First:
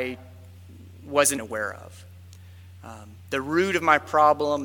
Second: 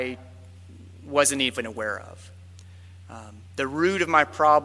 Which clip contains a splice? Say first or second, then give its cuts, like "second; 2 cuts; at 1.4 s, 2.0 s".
first; 1 cut; at 1.4 s